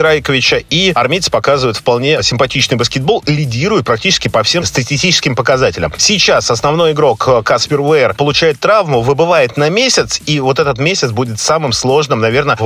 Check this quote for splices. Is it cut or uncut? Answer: uncut